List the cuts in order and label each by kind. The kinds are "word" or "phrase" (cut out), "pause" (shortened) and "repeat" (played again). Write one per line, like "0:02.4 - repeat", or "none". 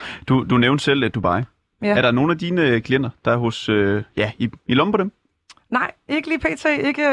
none